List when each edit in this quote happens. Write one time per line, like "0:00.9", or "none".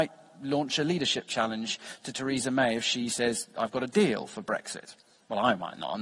none